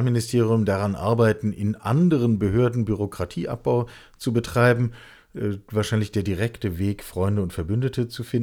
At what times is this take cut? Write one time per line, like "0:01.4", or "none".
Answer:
none